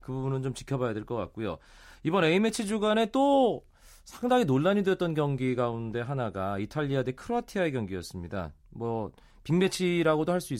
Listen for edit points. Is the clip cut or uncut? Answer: uncut